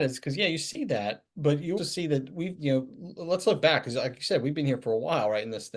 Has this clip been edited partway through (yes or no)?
yes